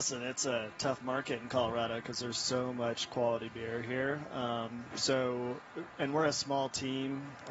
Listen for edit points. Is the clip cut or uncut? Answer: uncut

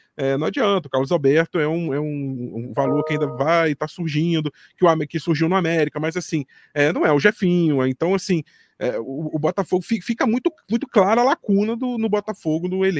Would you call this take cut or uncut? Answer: uncut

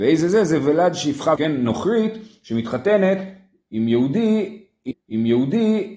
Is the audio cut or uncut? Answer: cut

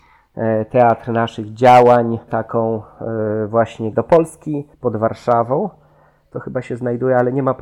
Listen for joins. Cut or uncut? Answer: cut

